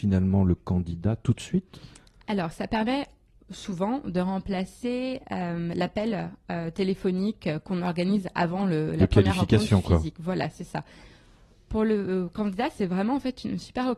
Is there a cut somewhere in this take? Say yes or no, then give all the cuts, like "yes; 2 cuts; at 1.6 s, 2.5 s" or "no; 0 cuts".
no; 0 cuts